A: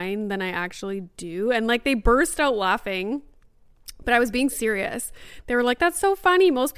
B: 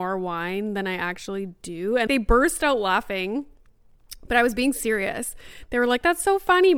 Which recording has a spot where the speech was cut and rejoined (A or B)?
B